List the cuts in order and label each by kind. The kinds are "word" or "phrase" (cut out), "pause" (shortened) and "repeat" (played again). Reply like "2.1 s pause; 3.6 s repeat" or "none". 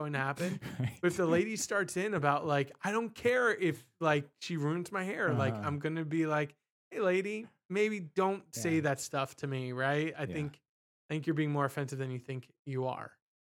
none